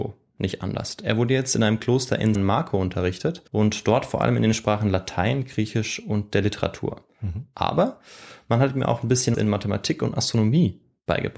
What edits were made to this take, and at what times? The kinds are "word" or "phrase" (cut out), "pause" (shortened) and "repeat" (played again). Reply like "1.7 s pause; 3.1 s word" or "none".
2.3 s word; 3.5 s pause; 9.3 s word